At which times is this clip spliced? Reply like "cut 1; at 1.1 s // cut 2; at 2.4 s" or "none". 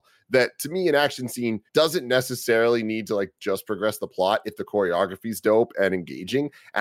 cut 1; at 1.7 s